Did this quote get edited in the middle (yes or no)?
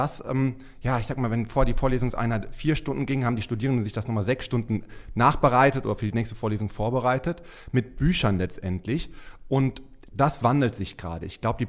no